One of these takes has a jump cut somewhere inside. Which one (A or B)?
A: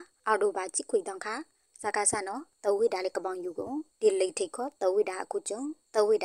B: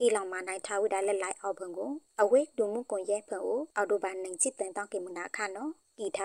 B